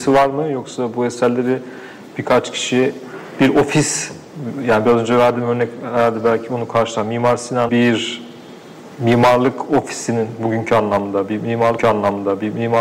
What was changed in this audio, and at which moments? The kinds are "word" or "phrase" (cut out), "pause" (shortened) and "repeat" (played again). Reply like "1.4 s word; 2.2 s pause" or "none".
7.7 s word; 11.8 s repeat